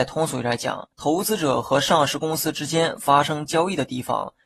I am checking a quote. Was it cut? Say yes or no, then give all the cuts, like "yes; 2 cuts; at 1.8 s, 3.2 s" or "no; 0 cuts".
yes; 1 cut; at 0.9 s